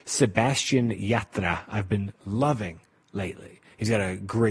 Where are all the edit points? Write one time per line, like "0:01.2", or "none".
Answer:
none